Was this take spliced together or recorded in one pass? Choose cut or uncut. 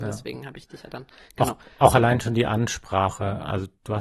uncut